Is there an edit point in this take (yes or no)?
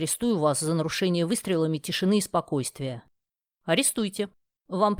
no